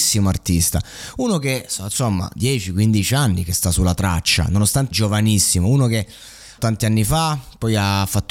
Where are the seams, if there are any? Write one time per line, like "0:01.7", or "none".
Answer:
0:04.9
0:06.6

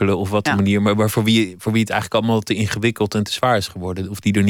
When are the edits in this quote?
none

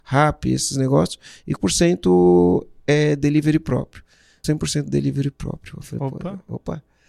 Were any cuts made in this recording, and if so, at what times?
0:01.6
0:04.4

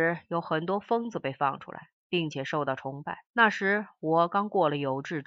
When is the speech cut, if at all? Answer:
0:03.3

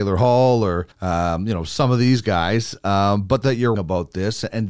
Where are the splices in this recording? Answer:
0:00.9
0:03.4
0:03.7

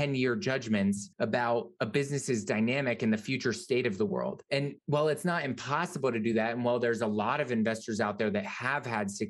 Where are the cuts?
none

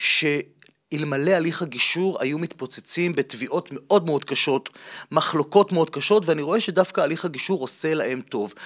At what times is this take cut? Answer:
none

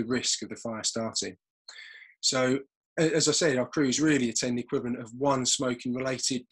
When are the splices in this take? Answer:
none

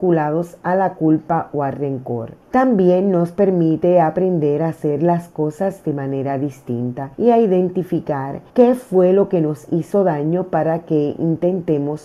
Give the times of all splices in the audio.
0:02.4
0:07.1
0:08.5

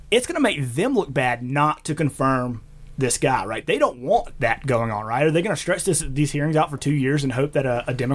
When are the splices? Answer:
none

